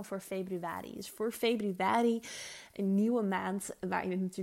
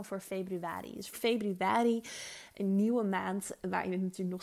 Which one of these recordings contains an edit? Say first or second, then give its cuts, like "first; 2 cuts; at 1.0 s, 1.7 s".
second; 1 cut; at 1.1 s